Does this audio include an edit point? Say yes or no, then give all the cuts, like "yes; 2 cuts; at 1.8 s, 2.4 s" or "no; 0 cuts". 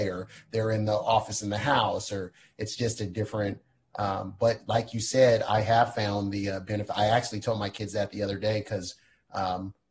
no; 0 cuts